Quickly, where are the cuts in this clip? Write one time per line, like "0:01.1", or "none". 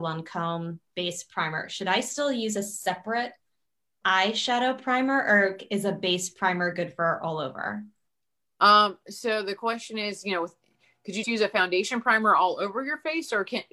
0:11.2